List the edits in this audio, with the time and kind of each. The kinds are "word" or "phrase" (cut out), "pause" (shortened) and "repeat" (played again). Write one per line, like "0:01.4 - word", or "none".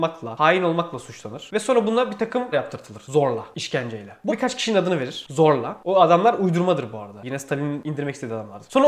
0:02.5 - word
0:04.3 - word